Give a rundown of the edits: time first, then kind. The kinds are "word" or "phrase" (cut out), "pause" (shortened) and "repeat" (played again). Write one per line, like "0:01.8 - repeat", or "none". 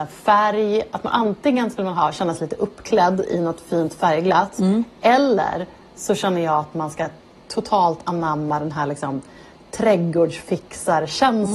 none